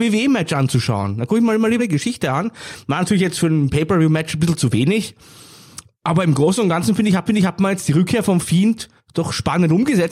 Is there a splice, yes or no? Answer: yes